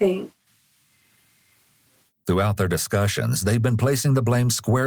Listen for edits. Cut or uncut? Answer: uncut